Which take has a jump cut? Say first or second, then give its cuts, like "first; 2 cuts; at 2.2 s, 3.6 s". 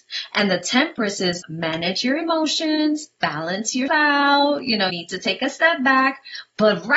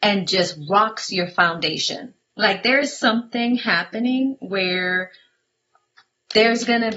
first; 3 cuts; at 1.4 s, 3.9 s, 4.9 s